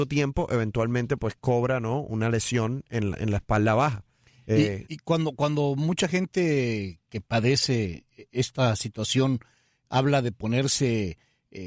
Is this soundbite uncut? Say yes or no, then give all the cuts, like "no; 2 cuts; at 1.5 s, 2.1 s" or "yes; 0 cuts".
yes; 0 cuts